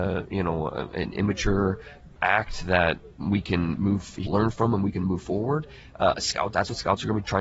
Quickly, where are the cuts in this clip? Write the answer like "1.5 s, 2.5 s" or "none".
2.2 s, 4.3 s